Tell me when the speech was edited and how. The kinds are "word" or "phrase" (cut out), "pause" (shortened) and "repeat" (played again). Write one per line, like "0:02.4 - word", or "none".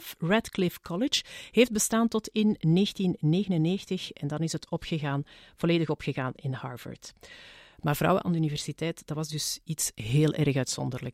none